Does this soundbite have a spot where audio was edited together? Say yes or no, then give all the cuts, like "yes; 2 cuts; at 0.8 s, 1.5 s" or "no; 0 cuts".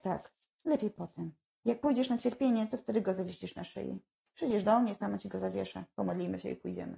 no; 0 cuts